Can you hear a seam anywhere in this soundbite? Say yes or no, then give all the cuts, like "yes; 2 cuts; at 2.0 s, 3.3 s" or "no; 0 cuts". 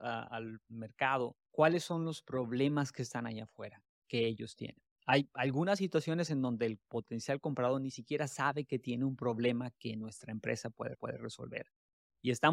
yes; 2 cuts; at 1.5 s, 10.9 s